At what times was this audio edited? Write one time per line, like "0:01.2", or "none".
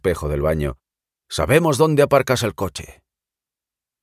none